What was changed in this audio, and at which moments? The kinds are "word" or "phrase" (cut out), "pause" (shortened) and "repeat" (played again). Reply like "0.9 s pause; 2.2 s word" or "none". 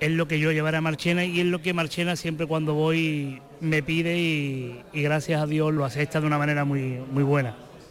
5.8 s word